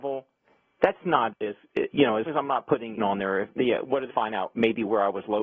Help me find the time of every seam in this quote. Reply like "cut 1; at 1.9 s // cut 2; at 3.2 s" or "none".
cut 1; at 1.3 s // cut 2; at 2.3 s // cut 3; at 3.0 s // cut 4; at 4.1 s